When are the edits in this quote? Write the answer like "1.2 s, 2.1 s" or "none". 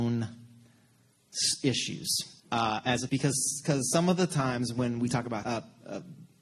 2.4 s, 3.1 s, 5.4 s

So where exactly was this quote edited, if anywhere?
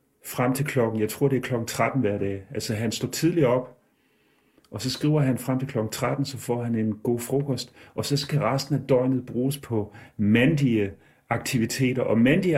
none

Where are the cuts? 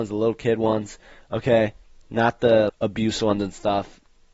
2.7 s

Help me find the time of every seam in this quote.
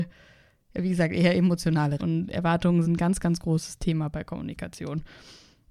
2.0 s, 2.8 s

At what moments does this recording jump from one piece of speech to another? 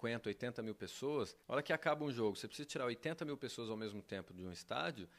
1.4 s

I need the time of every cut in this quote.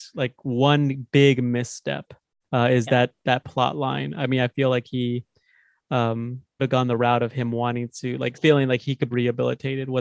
2.4 s, 6.6 s, 8.3 s, 9.1 s

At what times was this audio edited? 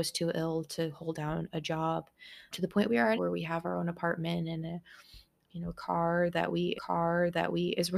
2.5 s, 3.1 s, 5.4 s, 6.7 s

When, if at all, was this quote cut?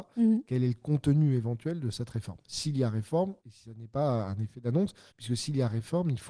3.4 s, 5.1 s

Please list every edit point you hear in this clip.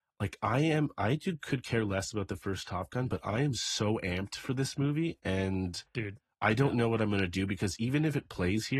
none

